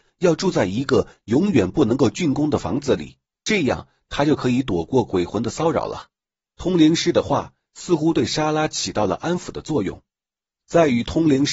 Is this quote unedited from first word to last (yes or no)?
no